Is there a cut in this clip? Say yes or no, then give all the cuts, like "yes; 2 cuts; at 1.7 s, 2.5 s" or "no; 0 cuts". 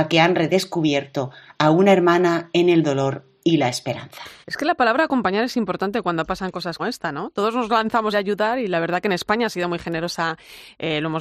yes; 3 cuts; at 4.4 s, 6.8 s, 8.1 s